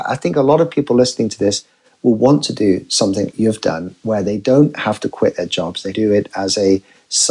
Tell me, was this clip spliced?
yes; 2 cuts; at 3.3 s, 5.9 s

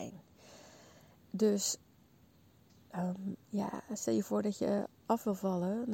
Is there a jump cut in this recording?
no; 0 cuts

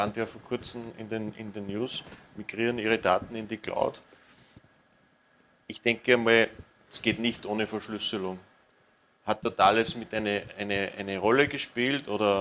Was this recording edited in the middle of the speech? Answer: no; 0 cuts

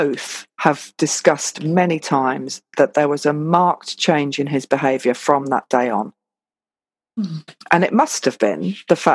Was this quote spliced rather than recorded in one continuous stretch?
no; 0 cuts

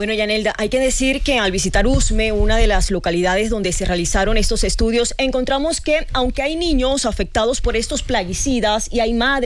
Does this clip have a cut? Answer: no; 0 cuts

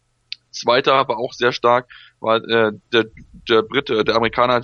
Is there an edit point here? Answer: no; 0 cuts

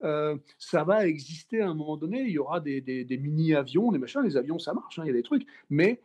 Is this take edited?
no; 0 cuts

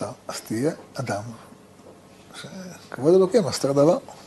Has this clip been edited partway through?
no; 0 cuts

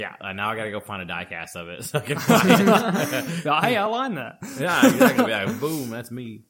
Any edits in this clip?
no; 0 cuts

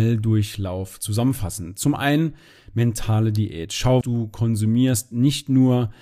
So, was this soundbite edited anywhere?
yes; 1 cut; at 4.0 s

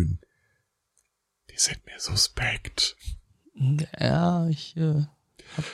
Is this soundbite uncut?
yes; 0 cuts

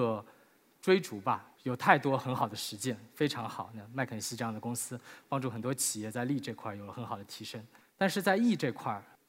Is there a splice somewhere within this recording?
yes; 2 cuts; at 1.5 s, 7.8 s

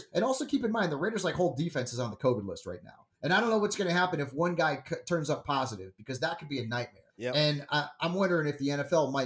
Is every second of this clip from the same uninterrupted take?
no; 2 cuts; at 3.1 s, 7.1 s

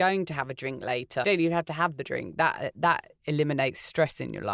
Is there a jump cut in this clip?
yes; 1 cut; at 1.2 s

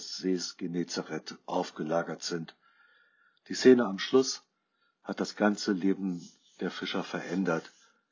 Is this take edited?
no; 0 cuts

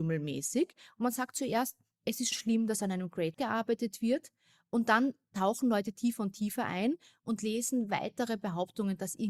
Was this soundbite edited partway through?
yes; 2 cuts; at 2.3 s, 3.3 s

